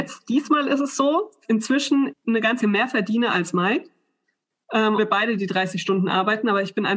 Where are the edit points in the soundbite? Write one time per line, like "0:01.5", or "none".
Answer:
0:01.4
0:02.1
0:02.6
0:05.0

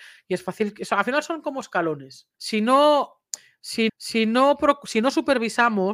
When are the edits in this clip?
0:02.3
0:03.9

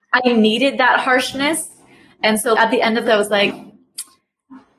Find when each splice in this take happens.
0:02.5
0:03.1

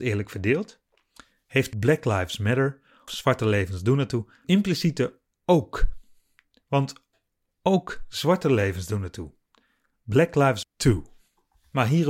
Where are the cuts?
0:01.7
0:03.1
0:04.4
0:10.6

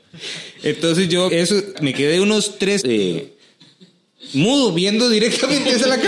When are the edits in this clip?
0:01.3
0:01.7
0:02.8

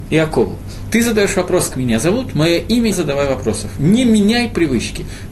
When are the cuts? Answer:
0:01.7
0:02.9

